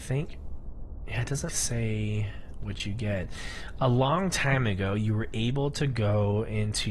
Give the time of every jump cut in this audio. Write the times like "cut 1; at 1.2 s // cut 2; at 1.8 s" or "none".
cut 1; at 1.5 s